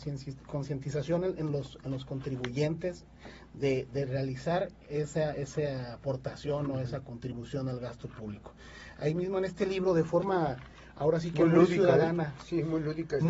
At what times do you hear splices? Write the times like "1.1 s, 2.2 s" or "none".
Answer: 4.8 s